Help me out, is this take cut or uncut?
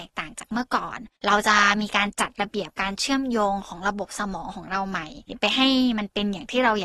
cut